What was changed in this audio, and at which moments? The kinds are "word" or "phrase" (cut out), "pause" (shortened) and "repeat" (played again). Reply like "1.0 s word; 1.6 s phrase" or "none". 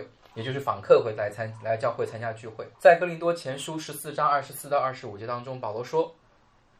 2.7 s pause